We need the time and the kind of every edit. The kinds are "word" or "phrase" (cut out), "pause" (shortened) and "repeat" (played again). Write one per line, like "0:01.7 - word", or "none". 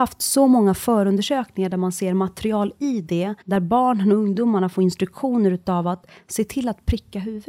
0:03.4 - pause